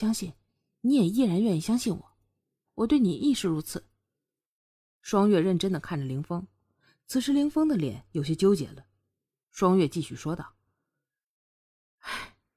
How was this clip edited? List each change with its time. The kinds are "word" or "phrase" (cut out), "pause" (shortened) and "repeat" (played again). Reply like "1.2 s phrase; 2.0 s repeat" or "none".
2.7 s phrase